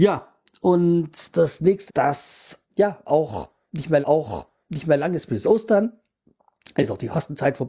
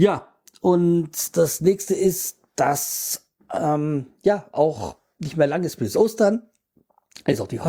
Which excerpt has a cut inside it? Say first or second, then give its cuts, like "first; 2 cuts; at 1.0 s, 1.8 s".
first; 3 cuts; at 1.9 s, 2.7 s, 4.0 s